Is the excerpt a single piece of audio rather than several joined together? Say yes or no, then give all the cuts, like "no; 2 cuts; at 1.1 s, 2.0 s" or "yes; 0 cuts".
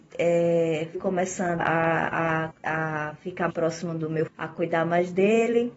no; 5 cuts; at 0.9 s, 1.6 s, 2.5 s, 3.5 s, 4.3 s